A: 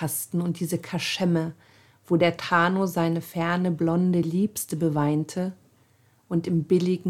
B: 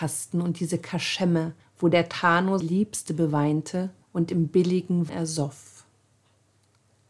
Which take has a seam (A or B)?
B